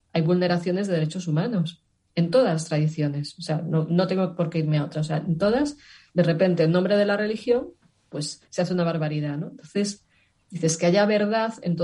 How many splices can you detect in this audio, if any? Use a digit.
1